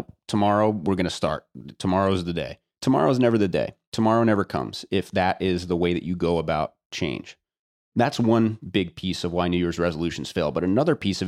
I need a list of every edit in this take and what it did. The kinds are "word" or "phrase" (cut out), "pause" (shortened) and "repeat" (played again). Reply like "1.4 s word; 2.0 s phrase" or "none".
2.7 s pause; 3.8 s pause; 7.7 s pause